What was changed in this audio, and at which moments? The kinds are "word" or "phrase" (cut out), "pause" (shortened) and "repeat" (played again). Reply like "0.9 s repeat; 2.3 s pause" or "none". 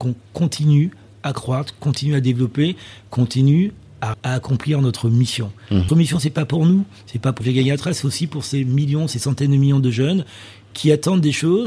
4.1 s word; 5.9 s word; 7.4 s word